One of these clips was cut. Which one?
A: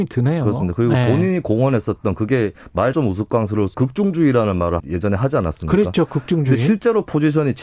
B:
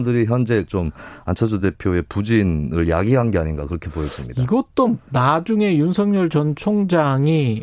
A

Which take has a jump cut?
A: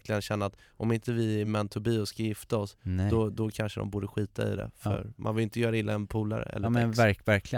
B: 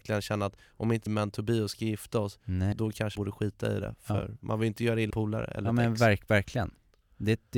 B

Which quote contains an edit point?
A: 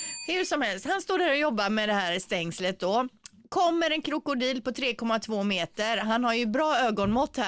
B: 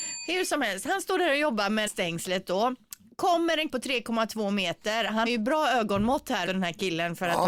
B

